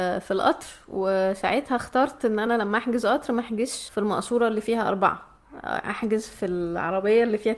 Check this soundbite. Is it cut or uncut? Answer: uncut